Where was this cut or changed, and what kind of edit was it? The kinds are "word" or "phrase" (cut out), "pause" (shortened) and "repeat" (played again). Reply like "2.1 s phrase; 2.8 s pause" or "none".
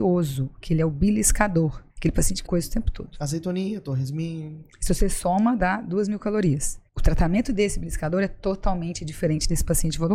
1.9 s pause; 2.5 s word; 6.9 s pause